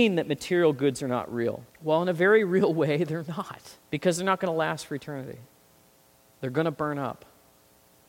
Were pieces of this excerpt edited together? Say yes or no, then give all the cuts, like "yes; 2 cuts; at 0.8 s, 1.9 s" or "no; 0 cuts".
yes; 2 cuts; at 1.7 s, 3.8 s